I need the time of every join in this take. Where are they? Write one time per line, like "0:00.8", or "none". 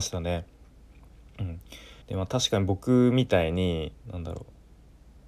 0:02.0
0:04.0